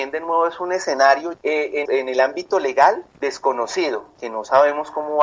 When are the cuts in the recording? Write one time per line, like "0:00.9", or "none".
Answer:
0:01.3
0:01.9
0:03.1